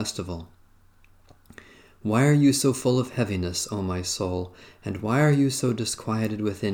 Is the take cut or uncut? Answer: uncut